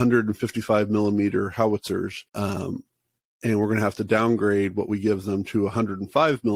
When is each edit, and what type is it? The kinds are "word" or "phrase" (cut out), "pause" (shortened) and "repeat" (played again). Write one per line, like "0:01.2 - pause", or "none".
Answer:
0:02.3 - pause